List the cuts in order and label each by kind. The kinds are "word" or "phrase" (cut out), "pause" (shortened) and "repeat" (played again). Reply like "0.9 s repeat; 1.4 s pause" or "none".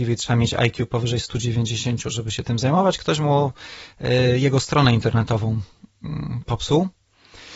none